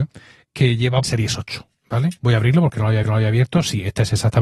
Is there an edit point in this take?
yes; 3 cuts; at 1.0 s, 2.2 s, 3.0 s

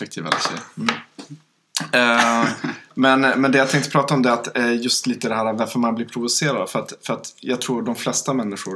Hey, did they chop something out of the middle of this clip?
no; 0 cuts

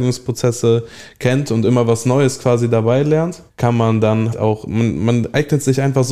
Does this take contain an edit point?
yes; 2 cuts; at 3.5 s, 4.3 s

